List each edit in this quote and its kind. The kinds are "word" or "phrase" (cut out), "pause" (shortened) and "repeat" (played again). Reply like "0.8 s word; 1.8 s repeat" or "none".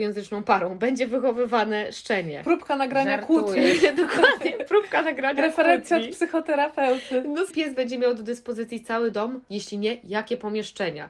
7.5 s phrase

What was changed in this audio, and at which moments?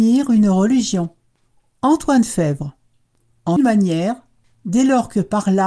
3.6 s word

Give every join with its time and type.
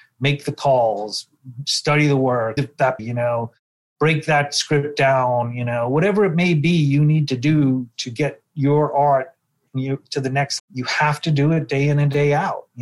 2.6 s word; 3.0 s word; 10.6 s word

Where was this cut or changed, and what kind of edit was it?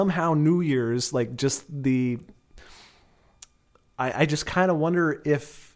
none

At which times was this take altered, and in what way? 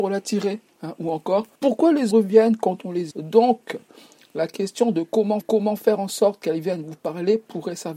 1.5 s pause; 2.1 s word; 3.1 s word; 5.4 s repeat

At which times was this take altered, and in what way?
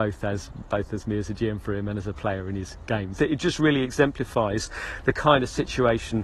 3.2 s word

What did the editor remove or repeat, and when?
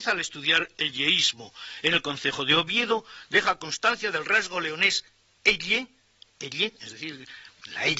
none

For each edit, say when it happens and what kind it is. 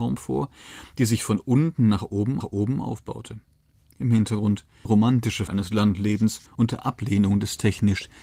2.4 s repeat; 4.9 s word; 5.5 s word; 6.5 s pause

